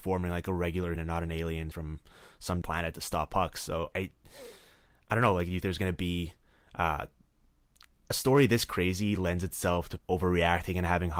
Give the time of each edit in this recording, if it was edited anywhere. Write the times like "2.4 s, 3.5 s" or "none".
1.0 s, 1.7 s, 2.6 s, 3.9 s, 5.6 s, 10.0 s